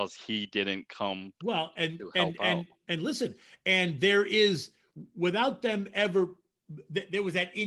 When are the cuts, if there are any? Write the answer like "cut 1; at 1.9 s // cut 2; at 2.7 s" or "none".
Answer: cut 1; at 1.4 s